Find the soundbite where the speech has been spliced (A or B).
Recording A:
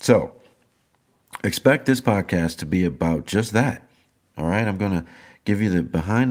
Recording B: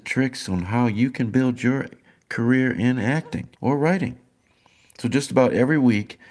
B